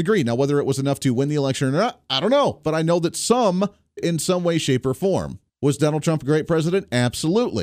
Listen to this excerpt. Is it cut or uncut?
cut